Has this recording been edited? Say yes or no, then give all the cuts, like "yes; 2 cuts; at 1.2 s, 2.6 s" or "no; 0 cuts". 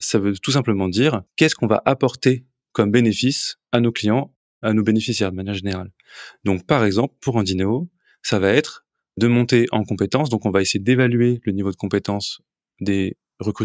no; 0 cuts